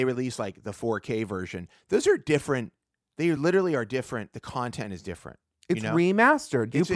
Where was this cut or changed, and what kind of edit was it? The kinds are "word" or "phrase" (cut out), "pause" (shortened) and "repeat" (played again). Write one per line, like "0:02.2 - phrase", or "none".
none